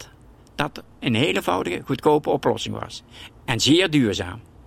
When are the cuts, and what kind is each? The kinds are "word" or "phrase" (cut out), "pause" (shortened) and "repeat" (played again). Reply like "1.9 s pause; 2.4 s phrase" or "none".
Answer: none